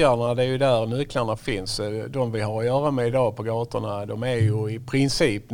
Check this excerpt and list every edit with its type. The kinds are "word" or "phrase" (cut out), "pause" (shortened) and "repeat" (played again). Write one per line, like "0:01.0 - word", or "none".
none